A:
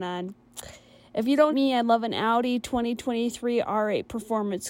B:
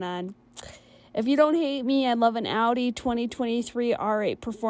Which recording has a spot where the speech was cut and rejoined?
A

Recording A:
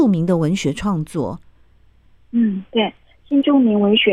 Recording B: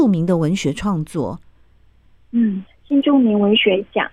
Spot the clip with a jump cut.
B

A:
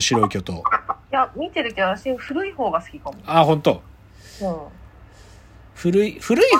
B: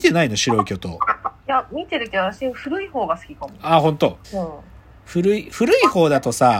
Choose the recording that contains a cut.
B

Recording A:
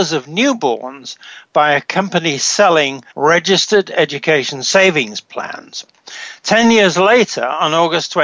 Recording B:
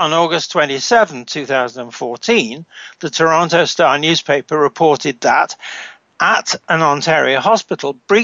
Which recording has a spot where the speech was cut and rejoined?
A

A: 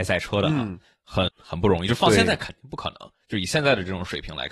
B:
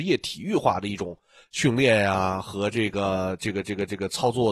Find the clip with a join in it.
A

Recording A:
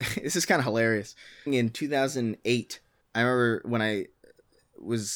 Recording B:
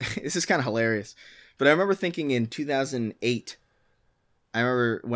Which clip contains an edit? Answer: A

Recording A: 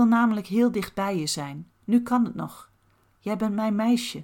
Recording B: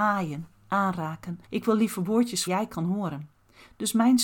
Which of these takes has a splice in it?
B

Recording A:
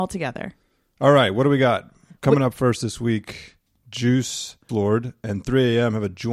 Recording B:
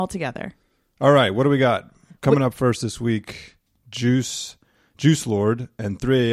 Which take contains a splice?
A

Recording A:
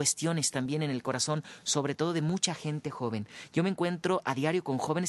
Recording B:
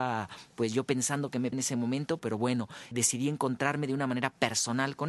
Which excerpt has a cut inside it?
B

